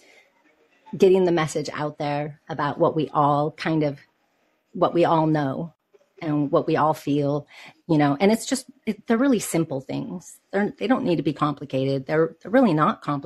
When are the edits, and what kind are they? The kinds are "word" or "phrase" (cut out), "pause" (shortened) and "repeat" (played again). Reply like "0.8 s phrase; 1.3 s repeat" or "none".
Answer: none